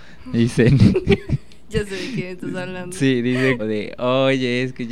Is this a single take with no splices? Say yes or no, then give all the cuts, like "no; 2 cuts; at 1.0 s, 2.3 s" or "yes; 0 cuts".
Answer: no; 1 cut; at 3.6 s